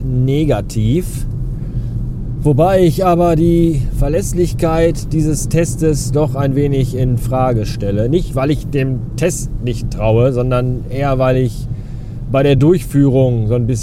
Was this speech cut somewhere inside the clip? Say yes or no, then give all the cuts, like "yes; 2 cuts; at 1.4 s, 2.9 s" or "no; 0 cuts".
no; 0 cuts